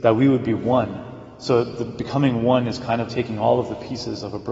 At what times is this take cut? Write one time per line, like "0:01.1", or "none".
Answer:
0:03.1